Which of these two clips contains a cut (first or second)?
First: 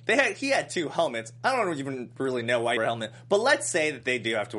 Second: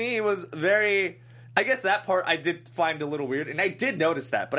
first